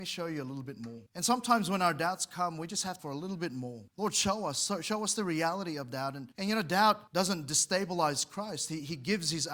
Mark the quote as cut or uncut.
cut